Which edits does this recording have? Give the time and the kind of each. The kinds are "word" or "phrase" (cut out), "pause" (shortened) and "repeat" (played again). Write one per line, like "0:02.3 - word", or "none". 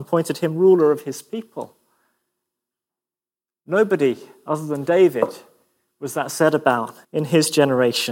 0:07.0 - pause